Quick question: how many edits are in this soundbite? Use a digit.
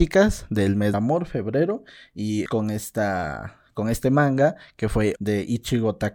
3